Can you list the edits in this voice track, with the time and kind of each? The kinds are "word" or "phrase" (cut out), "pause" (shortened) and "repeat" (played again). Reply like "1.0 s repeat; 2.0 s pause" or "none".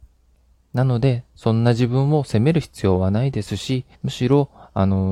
3.9 s pause